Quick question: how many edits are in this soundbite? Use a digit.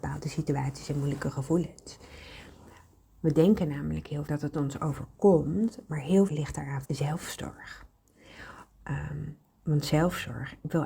3